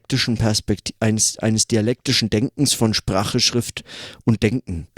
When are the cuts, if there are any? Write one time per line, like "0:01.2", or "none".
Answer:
none